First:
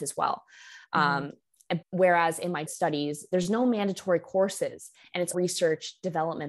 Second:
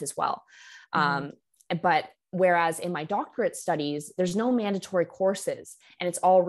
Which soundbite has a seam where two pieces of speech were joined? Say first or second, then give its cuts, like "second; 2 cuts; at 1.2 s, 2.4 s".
first; 3 cuts; at 1.8 s, 2.7 s, 5.3 s